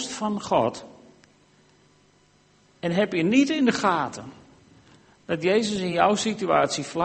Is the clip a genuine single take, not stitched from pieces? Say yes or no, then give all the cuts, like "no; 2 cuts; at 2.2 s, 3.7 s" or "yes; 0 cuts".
yes; 0 cuts